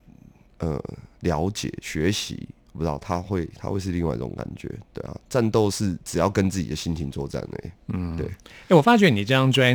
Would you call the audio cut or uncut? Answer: cut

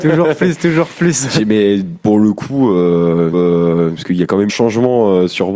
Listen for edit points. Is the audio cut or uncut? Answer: cut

